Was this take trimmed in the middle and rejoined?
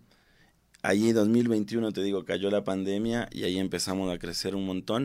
no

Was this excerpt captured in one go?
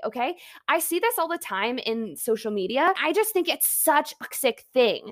yes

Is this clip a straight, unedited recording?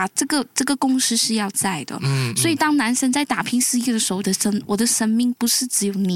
no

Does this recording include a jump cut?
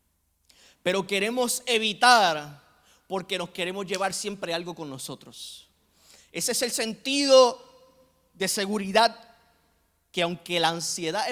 no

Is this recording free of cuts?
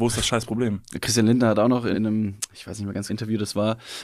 no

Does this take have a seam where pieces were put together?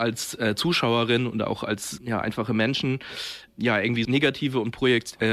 yes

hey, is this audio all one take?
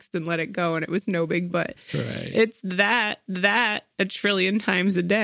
no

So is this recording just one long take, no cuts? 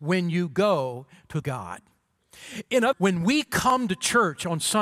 no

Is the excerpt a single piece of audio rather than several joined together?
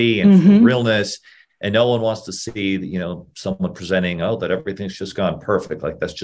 yes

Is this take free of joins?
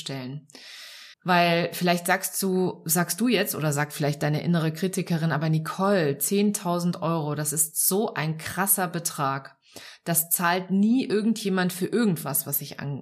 no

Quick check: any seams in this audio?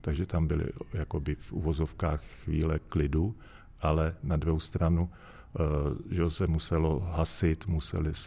no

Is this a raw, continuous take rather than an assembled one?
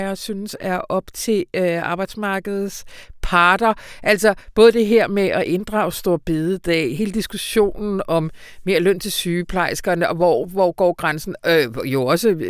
yes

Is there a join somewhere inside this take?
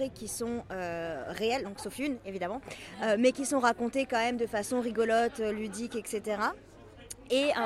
no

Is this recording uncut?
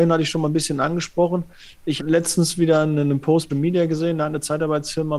no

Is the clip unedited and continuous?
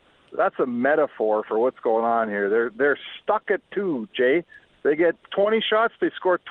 yes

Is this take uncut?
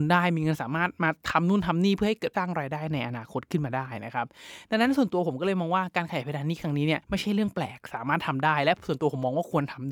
no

